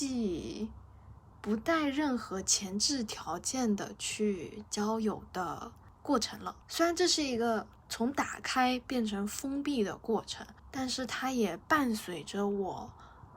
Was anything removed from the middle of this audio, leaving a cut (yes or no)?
yes